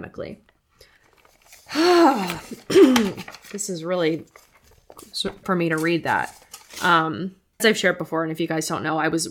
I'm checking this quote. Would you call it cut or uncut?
cut